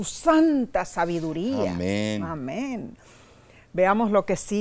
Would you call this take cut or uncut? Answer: uncut